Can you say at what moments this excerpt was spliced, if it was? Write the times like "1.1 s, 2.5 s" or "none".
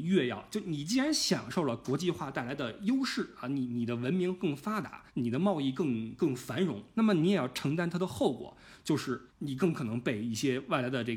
5.1 s, 9.3 s